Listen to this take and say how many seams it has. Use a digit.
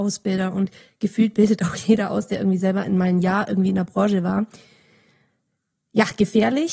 0